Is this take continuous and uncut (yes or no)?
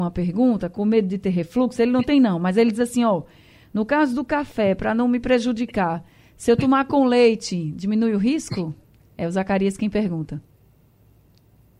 yes